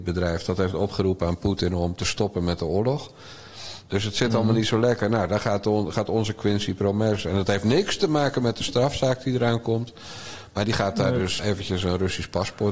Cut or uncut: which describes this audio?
cut